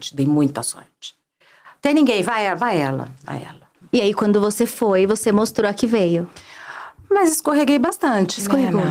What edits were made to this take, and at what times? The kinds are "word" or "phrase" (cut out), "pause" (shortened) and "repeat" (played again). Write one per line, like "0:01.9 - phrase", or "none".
none

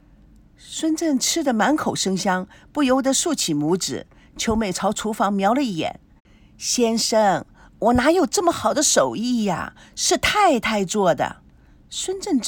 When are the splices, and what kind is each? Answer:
none

